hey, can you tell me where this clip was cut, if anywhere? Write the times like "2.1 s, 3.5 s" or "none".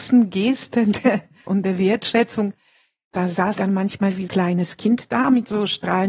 1.5 s, 3.6 s, 4.3 s